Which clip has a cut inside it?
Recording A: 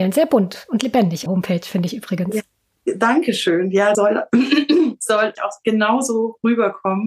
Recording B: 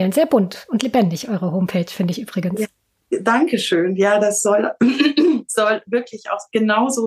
A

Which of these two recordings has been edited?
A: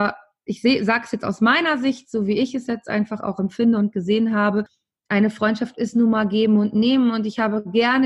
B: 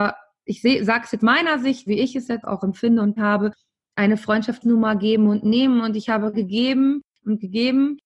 B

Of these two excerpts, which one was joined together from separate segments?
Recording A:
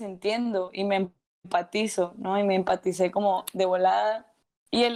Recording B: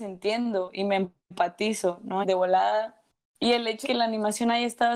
B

